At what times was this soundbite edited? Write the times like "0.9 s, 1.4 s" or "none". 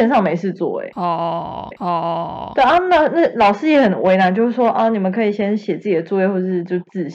1.7 s